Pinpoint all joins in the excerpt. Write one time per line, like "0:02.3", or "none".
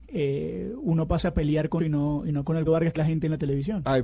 0:01.8
0:02.7
0:03.0

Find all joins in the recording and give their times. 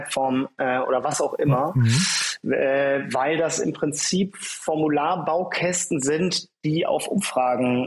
none

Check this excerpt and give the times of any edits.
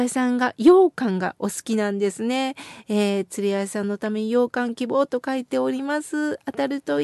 none

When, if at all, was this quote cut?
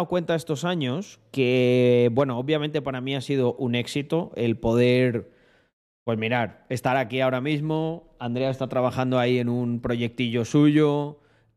none

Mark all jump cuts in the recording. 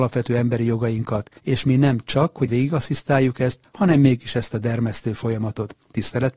0:01.4
0:02.5
0:04.2

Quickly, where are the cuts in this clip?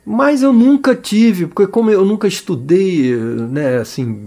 none

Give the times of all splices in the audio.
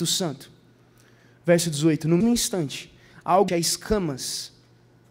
0:02.2
0:03.5

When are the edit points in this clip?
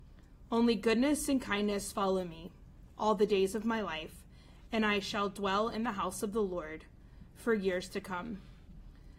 none

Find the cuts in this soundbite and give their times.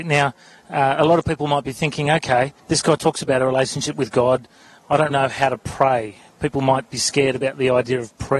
0:02.6
0:05.1

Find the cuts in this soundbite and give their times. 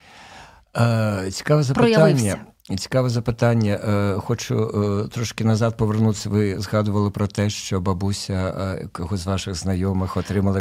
none

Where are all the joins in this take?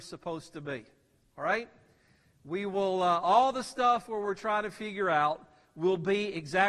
none

